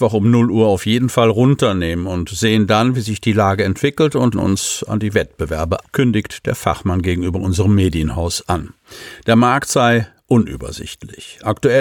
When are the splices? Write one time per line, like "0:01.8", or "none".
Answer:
0:04.3
0:05.8